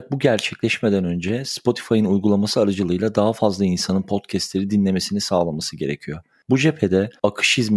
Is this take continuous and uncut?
yes; 0 cuts

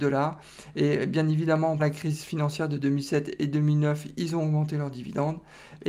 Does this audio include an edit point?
yes; 1 cut; at 1.8 s

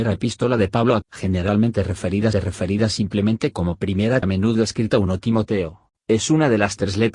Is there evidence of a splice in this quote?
yes; 3 cuts; at 1.0 s, 2.3 s, 4.2 s

